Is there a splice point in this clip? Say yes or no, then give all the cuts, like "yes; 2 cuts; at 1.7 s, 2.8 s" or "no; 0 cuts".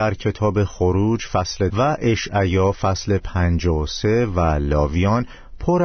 yes; 1 cut; at 1.7 s